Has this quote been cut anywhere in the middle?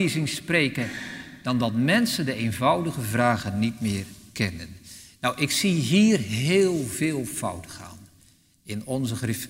no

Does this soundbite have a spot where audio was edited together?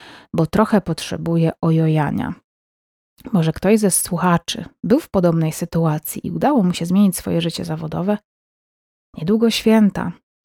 no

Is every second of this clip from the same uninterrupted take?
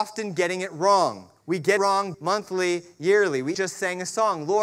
no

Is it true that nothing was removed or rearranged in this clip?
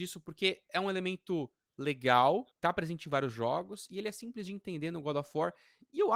no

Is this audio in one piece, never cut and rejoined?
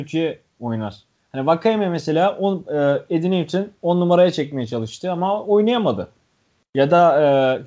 yes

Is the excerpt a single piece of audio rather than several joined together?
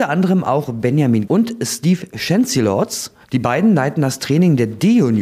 no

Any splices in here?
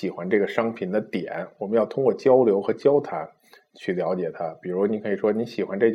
no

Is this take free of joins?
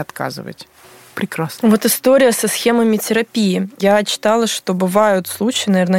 yes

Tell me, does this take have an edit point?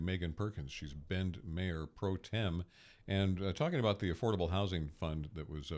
no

